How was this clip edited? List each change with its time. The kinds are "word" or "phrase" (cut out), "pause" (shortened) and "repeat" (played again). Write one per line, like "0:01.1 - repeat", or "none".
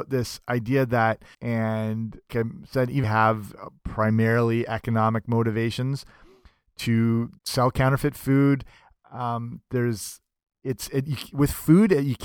0:01.3 - word
0:02.3 - word
0:03.0 - phrase
0:07.4 - pause

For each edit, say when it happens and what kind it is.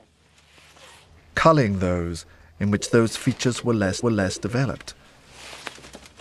0:04.0 - repeat

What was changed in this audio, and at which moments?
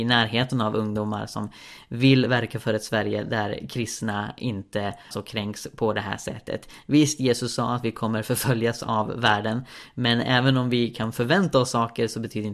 0:05.1 - word

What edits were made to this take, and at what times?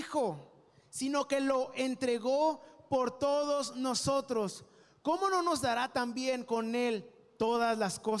none

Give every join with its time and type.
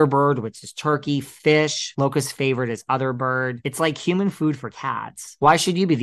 none

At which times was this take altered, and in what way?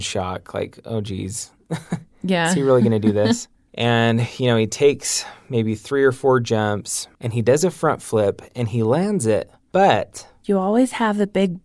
0:07.1 - pause

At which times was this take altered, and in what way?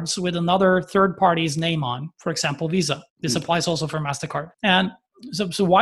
0:02.1 - pause
0:03.1 - pause
0:04.5 - pause

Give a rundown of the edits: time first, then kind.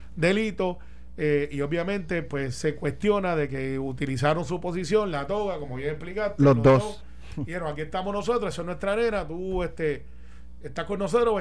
none

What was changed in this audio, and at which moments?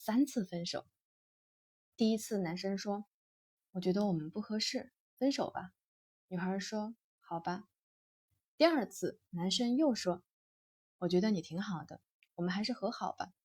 none

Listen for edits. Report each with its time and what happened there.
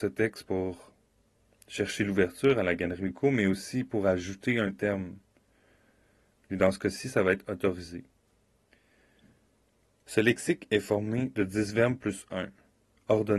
none

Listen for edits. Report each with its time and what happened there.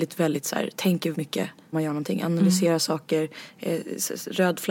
0:01.1 - word
0:01.7 - word

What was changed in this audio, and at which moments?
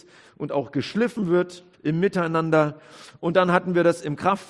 0:01.7 - pause

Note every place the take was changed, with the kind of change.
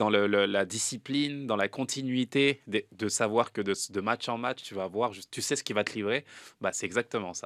none

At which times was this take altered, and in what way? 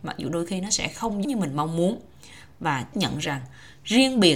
0:01.2 - word
0:02.9 - word

